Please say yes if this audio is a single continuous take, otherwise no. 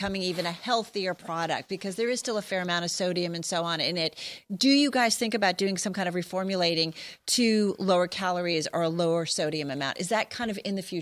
yes